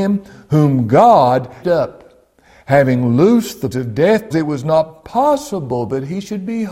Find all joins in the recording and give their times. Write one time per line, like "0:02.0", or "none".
0:01.6
0:03.7
0:04.3